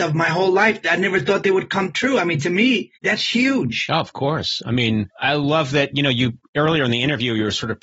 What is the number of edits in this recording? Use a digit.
2